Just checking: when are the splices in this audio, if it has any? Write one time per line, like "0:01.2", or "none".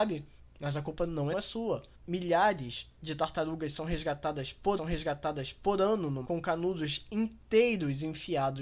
0:01.3
0:01.9
0:04.8
0:06.2